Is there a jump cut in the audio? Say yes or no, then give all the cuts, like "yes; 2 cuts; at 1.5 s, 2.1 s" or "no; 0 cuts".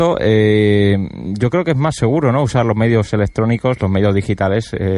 no; 0 cuts